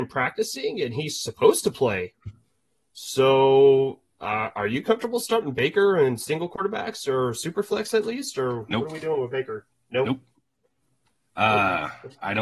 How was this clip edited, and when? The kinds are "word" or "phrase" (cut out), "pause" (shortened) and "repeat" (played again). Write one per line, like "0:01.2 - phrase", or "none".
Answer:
none